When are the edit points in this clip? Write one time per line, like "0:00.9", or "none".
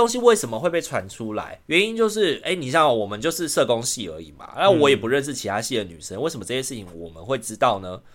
0:01.6

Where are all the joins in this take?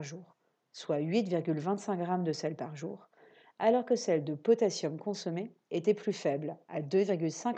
none

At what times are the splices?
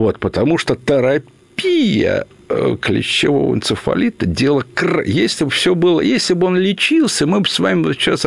none

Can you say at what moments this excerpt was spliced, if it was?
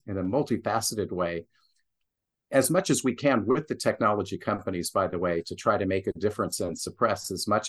none

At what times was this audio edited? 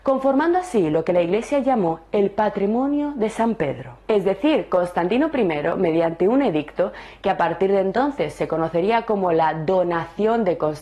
0:04.0

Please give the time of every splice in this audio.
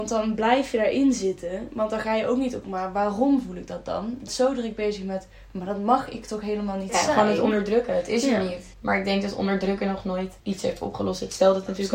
0:02.6
0:04.3
0:08.7
0:10.4

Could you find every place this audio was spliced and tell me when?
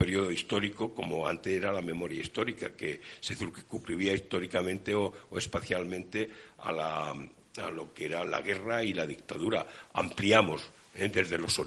0:08.3

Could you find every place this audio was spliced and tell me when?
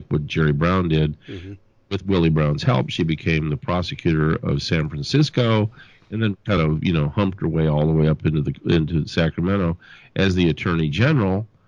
none

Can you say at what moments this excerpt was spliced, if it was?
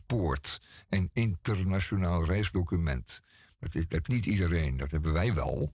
0:04.0

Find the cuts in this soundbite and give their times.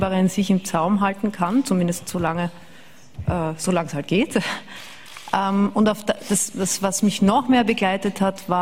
none

